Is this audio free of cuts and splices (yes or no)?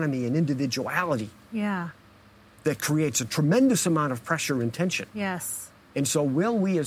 no